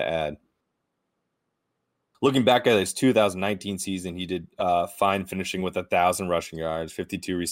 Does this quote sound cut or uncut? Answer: uncut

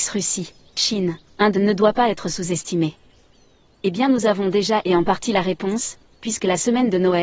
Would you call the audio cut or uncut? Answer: uncut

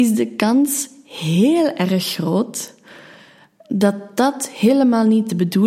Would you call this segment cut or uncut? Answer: uncut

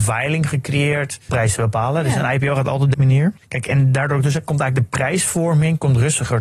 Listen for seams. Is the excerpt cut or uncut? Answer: cut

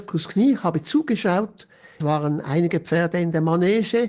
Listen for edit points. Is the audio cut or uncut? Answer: cut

